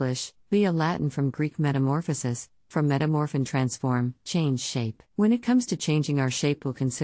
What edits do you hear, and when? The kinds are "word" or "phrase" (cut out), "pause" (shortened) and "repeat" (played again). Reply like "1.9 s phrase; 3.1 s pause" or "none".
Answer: 5.1 s pause